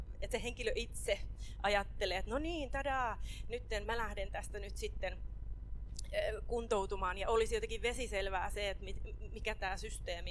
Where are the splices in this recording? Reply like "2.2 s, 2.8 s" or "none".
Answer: 3.8 s

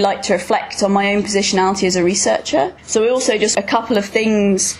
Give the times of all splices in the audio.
2.8 s, 3.5 s

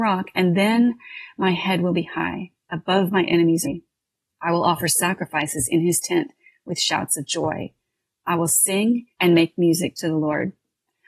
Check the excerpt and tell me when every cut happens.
3.6 s, 9.1 s

